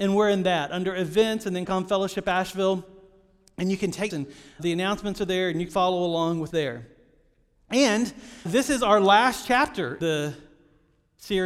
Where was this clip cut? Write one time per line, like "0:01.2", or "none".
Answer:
0:01.7
0:04.1
0:04.6
0:05.7
0:06.5
0:08.5
0:10.0